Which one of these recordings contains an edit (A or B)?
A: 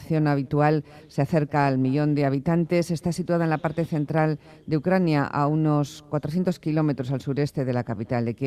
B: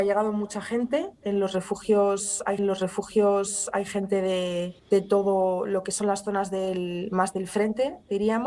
B